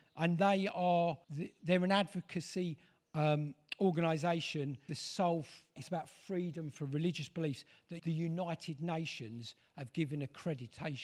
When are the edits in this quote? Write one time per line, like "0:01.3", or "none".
0:01.2
0:04.9
0:05.8
0:08.0